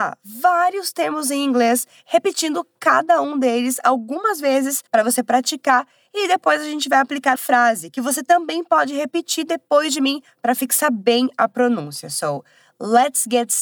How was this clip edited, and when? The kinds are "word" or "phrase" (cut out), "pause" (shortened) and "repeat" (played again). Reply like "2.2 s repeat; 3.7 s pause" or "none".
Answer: 4.9 s pause; 7.4 s word